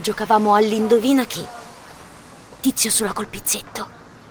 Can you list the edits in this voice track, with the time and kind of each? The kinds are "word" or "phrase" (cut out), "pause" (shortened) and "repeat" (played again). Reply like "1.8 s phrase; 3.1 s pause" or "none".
3.1 s word